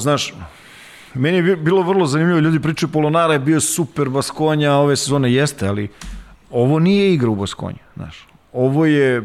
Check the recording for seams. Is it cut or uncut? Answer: cut